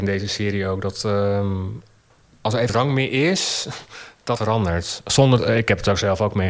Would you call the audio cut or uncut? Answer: cut